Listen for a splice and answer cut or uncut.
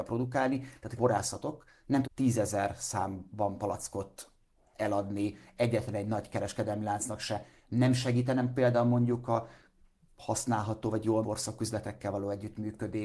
cut